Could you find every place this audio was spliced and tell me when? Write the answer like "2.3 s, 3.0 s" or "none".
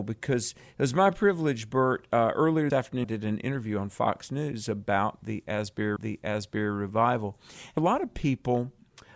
2.7 s, 3.0 s, 6.0 s, 7.8 s